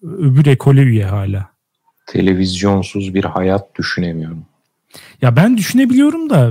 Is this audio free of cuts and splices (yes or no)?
yes